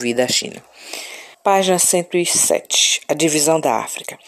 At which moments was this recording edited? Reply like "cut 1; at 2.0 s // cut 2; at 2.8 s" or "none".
cut 1; at 1.3 s